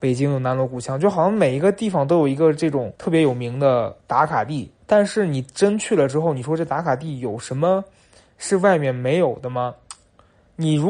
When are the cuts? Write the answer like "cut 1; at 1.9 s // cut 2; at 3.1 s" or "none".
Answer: cut 1; at 3.0 s // cut 2; at 4.0 s // cut 3; at 4.8 s